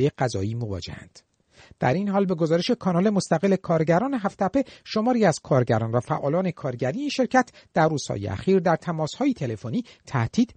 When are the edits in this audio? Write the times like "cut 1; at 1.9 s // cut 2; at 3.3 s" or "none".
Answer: none

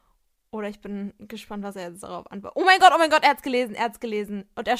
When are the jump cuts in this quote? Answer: none

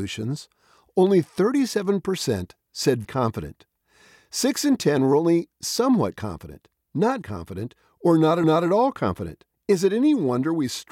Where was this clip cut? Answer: cut 1; at 3.0 s // cut 2; at 7.2 s // cut 3; at 8.4 s // cut 4; at 9.5 s

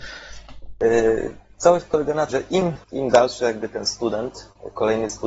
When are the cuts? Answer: cut 1; at 2.3 s // cut 2; at 2.8 s

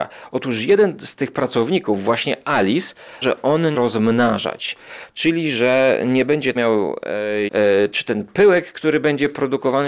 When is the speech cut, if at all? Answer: cut 1; at 3.2 s // cut 2; at 3.7 s // cut 3; at 6.6 s // cut 4; at 7.5 s

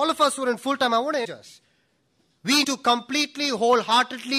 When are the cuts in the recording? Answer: cut 1; at 1.2 s // cut 2; at 2.6 s

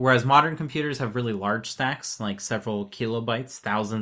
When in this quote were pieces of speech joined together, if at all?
none

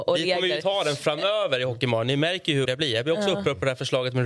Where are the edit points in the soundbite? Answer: cut 1; at 2.6 s

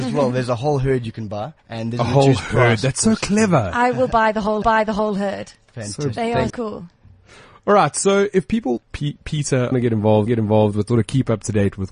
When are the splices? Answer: cut 1; at 1.6 s // cut 2; at 4.6 s // cut 3; at 6.5 s // cut 4; at 8.9 s // cut 5; at 9.7 s // cut 6; at 10.3 s // cut 7; at 10.9 s

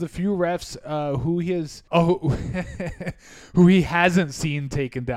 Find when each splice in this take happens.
cut 1; at 1.9 s

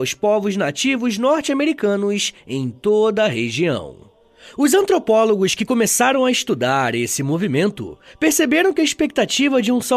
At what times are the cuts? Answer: none

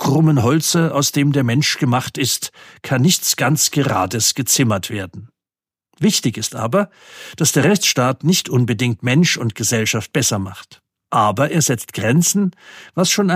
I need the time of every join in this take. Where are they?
none

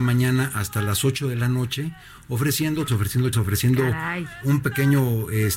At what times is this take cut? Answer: cut 1; at 2.9 s // cut 2; at 3.3 s

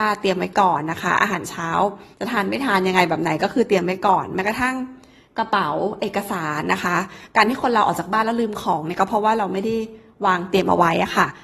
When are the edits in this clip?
cut 1; at 2.1 s

